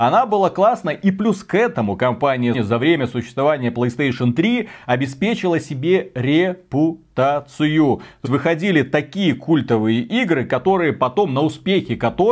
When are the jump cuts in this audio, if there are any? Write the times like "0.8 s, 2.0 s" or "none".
2.5 s, 8.2 s